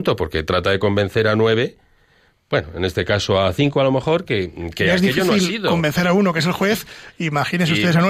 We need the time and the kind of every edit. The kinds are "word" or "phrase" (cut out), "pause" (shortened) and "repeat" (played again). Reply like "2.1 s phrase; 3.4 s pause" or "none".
none